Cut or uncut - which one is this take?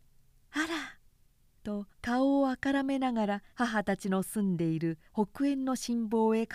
cut